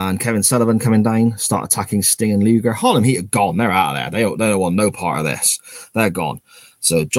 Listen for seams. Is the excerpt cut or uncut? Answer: uncut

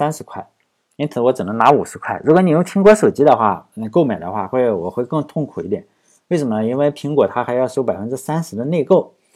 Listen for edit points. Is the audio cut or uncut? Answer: uncut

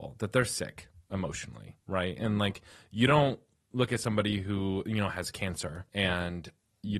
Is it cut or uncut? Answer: cut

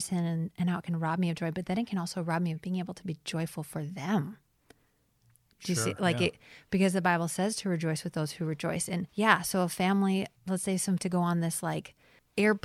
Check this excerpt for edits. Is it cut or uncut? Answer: cut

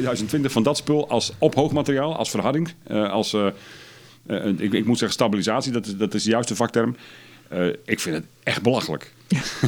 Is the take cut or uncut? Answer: uncut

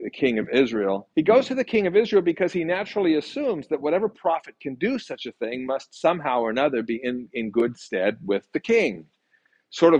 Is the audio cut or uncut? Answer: cut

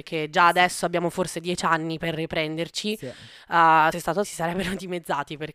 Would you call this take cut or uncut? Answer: cut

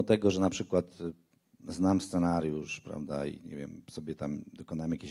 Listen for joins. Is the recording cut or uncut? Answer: uncut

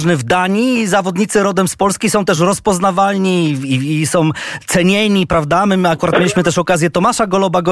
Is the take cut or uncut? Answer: uncut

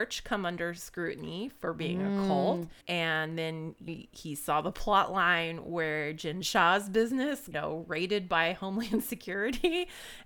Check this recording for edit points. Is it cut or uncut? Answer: cut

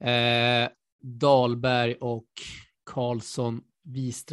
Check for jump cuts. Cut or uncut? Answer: cut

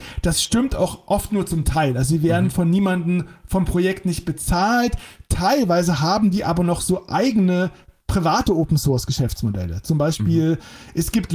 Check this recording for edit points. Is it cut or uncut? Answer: uncut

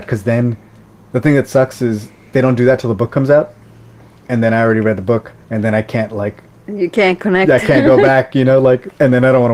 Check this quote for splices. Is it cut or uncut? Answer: cut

